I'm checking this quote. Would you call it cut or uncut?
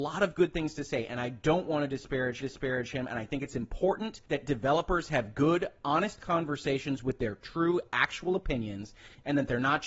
cut